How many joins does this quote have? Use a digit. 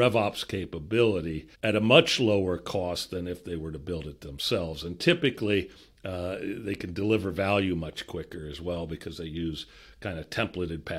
1